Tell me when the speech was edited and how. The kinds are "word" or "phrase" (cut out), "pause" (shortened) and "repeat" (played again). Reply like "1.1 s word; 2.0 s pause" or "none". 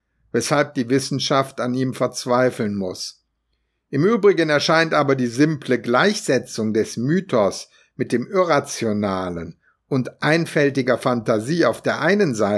none